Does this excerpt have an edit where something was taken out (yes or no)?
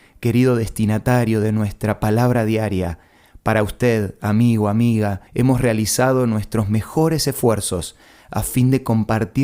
yes